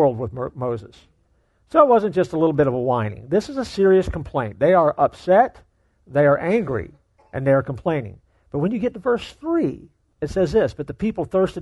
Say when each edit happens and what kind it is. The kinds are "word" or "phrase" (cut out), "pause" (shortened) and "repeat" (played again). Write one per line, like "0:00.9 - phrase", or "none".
none